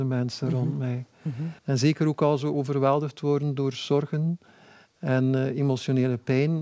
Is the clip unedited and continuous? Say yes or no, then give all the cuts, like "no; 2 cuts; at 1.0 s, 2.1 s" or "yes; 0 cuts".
no; 1 cut; at 1.6 s